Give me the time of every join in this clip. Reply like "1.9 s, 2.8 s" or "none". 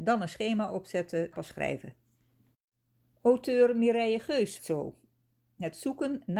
1.3 s, 4.6 s